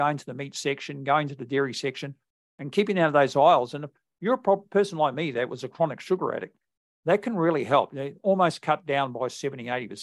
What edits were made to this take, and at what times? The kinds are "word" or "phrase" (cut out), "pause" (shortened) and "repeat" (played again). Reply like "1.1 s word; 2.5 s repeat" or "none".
none